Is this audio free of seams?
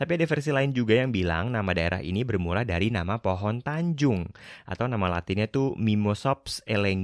yes; 0 cuts

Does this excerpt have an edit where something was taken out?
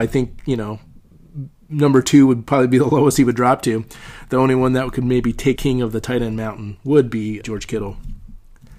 yes; 2 cuts; at 5.6 s, 7.4 s

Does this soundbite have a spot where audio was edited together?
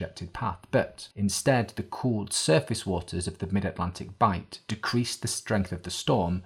yes; 1 cut; at 1.1 s

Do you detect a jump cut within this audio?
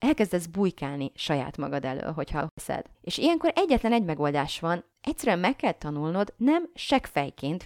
yes; 1 cut; at 2.9 s

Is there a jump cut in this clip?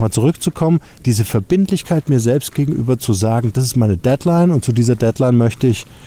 no; 0 cuts

